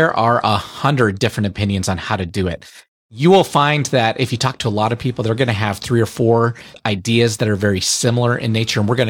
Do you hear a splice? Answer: no; 0 cuts

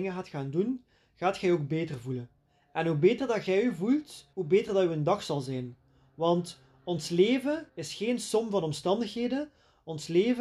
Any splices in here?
yes; 2 cuts; at 4.3 s, 7.7 s

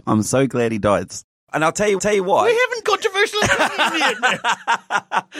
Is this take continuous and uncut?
no; 3 cuts; at 1.3 s, 2.0 s, 2.8 s

